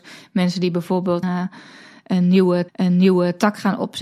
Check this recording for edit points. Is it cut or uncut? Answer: cut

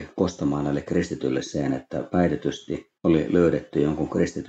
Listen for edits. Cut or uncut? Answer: cut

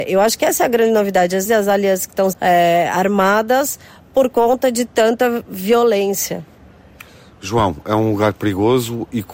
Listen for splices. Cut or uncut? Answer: cut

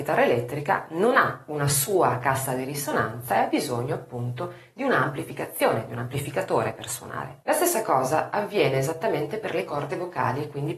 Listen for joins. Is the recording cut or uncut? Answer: cut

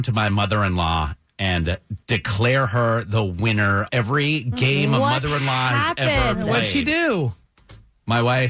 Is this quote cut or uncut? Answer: cut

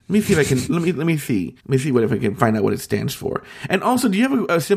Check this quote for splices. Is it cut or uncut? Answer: cut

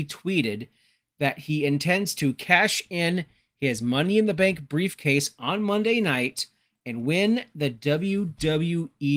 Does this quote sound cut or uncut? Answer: uncut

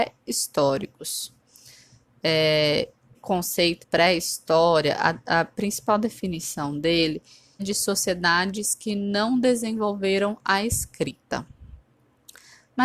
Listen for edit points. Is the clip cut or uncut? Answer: cut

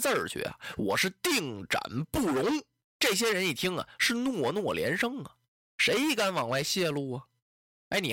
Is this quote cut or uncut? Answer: uncut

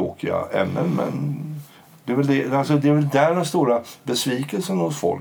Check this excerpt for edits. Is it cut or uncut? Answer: uncut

